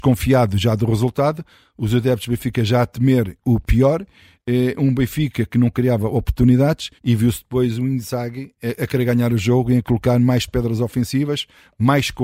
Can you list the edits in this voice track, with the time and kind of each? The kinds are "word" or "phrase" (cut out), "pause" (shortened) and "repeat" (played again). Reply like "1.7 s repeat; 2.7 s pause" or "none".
7.0 s pause